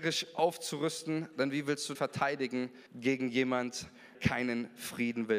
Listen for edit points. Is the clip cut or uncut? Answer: cut